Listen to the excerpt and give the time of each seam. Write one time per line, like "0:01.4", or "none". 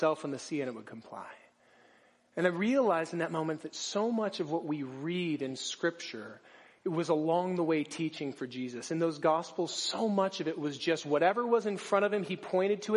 none